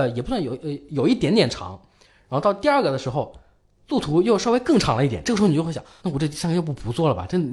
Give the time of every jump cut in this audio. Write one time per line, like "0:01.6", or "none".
0:06.0